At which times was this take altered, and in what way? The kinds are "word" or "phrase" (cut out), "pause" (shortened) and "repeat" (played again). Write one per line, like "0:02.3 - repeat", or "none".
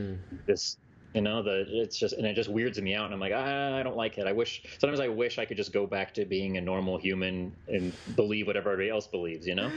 none